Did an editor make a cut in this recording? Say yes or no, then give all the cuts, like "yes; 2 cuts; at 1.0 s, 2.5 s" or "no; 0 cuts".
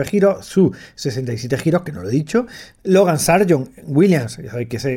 no; 0 cuts